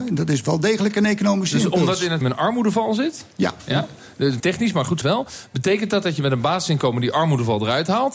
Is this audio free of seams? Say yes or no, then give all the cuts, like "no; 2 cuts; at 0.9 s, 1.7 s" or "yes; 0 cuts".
no; 3 cuts; at 2.2 s, 4.4 s, 5.0 s